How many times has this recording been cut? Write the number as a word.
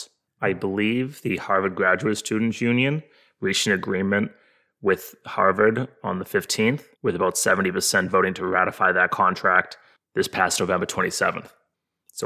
one